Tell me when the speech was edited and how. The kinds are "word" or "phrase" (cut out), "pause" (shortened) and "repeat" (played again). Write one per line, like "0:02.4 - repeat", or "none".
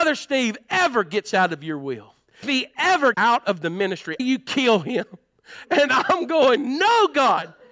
0:02.4 - word
0:03.1 - word
0:04.2 - phrase